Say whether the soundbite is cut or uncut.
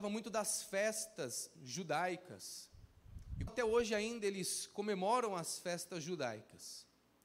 cut